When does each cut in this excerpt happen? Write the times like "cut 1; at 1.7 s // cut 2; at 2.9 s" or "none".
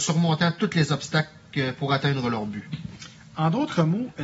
none